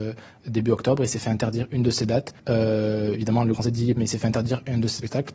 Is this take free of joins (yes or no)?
no